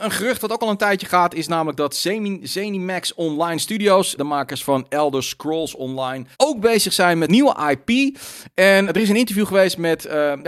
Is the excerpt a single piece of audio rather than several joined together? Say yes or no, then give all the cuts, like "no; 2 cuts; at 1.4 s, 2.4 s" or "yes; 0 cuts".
no; 4 cuts; at 4.2 s, 6.3 s, 7.3 s, 8.9 s